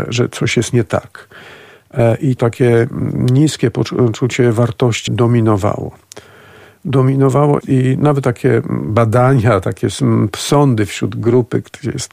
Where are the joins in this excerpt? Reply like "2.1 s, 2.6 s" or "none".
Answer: 2.4 s, 5.1 s, 7.6 s, 8.2 s